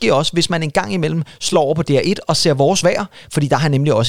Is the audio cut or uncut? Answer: uncut